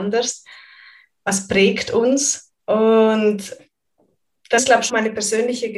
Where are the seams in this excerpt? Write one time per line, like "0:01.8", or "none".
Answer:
0:02.6
0:04.6
0:04.9